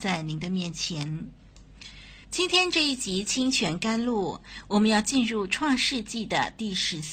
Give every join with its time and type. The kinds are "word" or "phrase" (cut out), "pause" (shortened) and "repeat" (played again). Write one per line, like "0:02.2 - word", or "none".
0:02.2 - pause